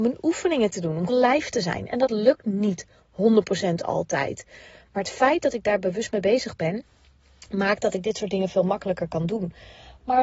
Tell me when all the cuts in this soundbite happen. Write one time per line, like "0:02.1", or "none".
0:01.1